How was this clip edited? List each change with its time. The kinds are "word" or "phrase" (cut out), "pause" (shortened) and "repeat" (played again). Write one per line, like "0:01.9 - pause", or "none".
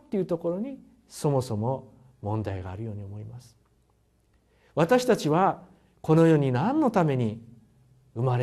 none